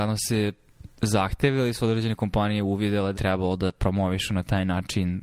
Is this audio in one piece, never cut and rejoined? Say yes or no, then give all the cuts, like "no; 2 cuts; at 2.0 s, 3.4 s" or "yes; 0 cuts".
no; 1 cut; at 3.1 s